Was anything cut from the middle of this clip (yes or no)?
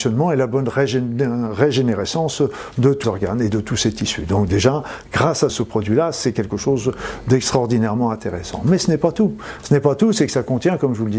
yes